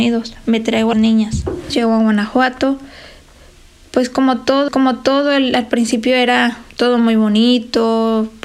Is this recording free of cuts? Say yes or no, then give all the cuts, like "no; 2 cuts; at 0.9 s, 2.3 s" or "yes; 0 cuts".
no; 3 cuts; at 0.9 s, 4.7 s, 6.7 s